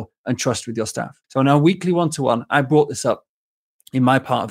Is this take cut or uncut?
cut